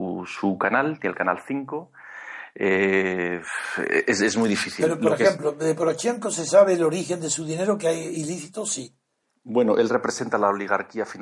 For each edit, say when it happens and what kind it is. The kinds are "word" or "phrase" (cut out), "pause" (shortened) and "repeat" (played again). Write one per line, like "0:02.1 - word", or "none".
none